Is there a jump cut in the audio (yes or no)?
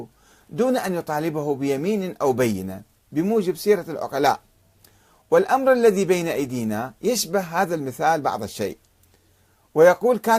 no